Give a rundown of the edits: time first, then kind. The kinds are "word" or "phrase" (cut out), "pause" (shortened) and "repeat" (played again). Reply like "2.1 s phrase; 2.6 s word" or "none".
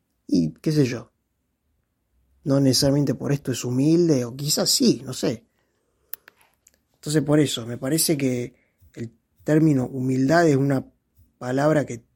none